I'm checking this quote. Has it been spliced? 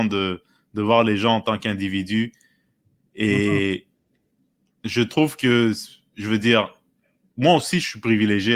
no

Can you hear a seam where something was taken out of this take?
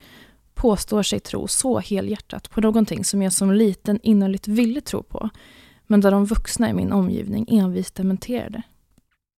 no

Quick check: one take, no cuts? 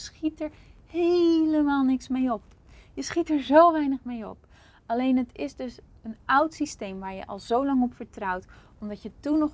yes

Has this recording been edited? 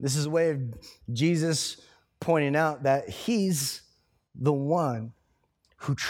no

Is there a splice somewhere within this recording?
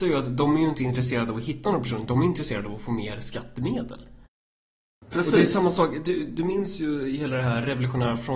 no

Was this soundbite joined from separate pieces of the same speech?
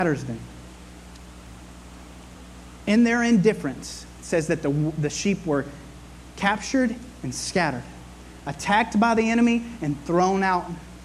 no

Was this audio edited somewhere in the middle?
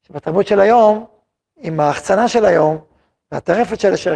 no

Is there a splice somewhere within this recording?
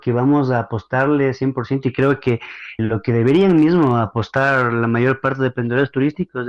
yes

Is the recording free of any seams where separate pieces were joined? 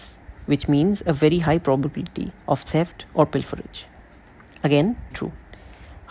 no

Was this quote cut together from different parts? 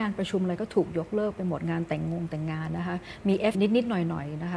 yes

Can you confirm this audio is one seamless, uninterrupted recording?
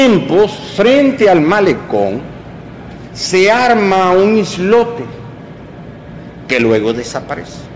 yes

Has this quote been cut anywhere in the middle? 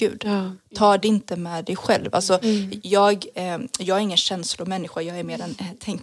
no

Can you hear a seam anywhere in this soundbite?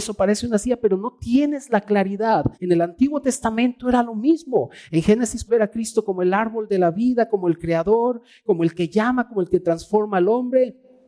yes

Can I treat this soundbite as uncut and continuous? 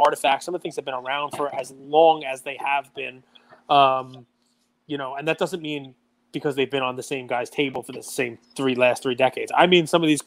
yes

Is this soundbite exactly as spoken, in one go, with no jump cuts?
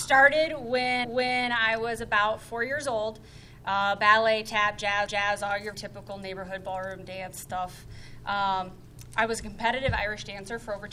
no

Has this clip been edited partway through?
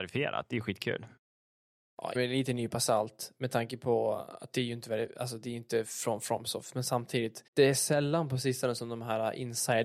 yes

